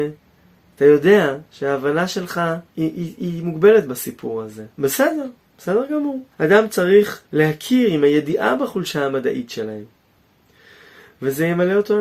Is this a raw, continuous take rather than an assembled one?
no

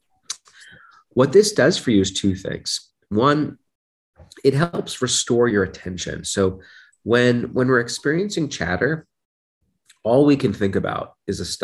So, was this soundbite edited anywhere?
no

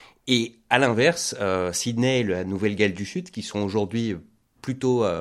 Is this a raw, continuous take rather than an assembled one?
yes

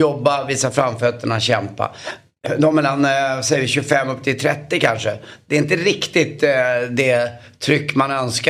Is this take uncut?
yes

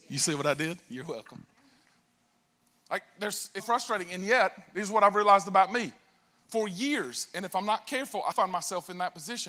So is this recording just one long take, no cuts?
no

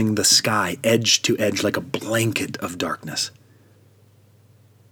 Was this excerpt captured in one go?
yes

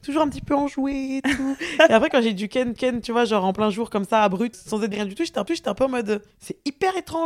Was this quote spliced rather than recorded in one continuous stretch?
yes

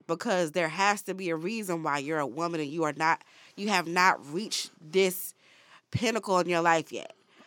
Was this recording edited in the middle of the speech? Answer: no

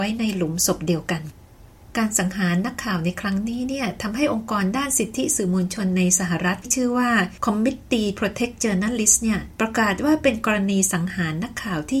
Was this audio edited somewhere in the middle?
yes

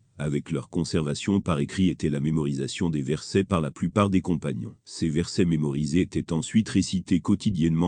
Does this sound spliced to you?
yes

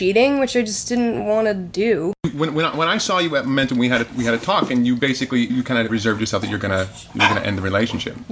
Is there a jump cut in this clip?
yes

